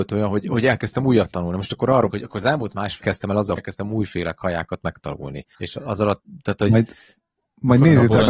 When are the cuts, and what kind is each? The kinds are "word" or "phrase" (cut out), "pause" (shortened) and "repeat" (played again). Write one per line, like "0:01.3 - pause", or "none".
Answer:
0:02.1 - word
0:03.0 - word
0:03.6 - phrase
0:05.5 - pause